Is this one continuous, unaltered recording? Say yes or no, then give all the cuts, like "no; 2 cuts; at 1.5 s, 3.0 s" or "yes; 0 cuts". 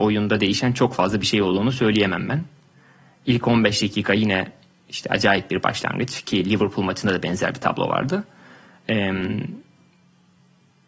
yes; 0 cuts